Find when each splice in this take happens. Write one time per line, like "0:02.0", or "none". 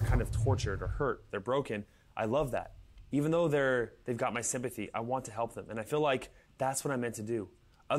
none